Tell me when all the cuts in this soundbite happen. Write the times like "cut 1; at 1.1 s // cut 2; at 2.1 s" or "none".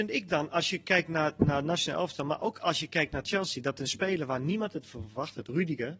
none